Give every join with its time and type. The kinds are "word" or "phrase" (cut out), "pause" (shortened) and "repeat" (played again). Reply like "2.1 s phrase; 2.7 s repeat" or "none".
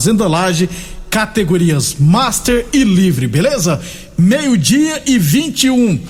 none